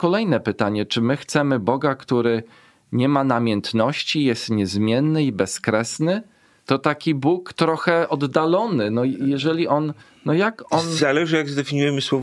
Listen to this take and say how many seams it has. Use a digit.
1